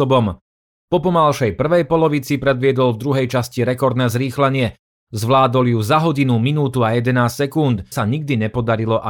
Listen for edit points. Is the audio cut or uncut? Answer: cut